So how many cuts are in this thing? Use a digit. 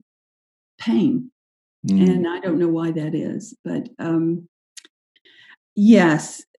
0